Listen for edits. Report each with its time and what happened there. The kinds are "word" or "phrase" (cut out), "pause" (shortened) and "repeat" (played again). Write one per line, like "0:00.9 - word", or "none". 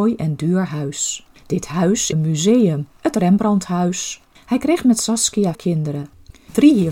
0:01.4 - pause
0:02.1 - phrase
0:04.4 - pause
0:05.5 - word